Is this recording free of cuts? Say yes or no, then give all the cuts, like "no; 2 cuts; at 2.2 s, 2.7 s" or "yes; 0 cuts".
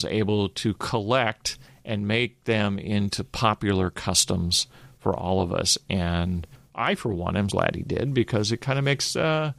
no; 1 cut; at 7.5 s